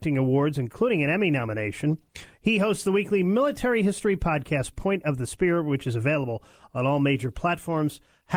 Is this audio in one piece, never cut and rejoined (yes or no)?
yes